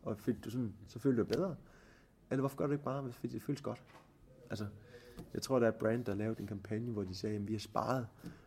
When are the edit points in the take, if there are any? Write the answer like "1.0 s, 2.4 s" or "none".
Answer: none